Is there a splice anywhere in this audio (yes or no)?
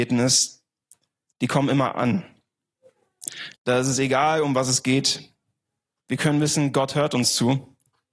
yes